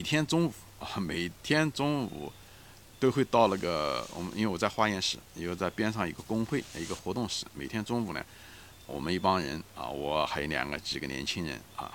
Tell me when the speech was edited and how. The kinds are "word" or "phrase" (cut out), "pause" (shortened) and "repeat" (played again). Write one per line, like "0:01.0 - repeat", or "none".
0:08.9 - word